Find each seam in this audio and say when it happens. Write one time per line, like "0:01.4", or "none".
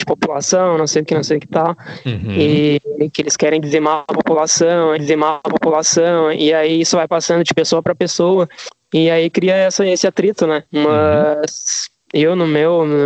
0:01.1
0:01.4
0:05.0
0:10.7

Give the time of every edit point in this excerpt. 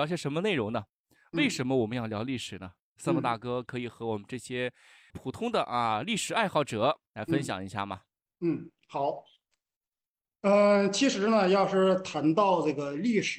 0:05.1

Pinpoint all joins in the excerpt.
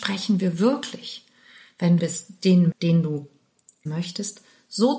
0:02.0
0:02.7
0:03.9

